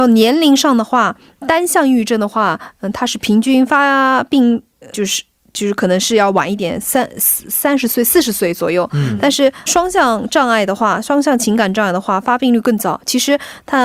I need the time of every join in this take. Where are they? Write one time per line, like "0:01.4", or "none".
0:01.4
0:04.9
0:09.7